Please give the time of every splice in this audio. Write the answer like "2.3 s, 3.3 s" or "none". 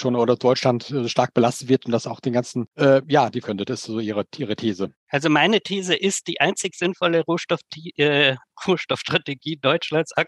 2.7 s, 3.4 s, 5.0 s